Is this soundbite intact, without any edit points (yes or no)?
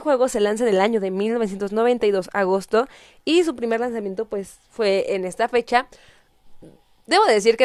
yes